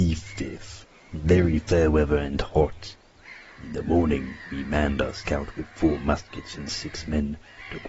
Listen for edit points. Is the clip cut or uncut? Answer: uncut